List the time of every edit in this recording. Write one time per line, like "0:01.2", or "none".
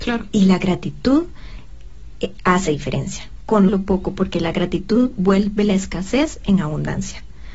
0:02.7
0:03.7